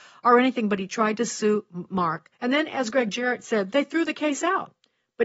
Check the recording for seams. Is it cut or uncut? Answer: cut